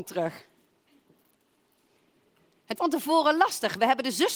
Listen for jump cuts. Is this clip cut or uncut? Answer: cut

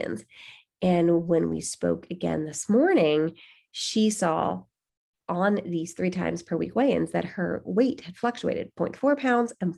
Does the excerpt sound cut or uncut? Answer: uncut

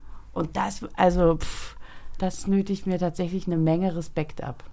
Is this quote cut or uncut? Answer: uncut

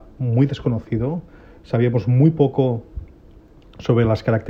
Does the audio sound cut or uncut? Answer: uncut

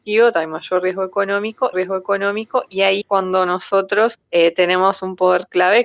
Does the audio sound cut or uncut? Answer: cut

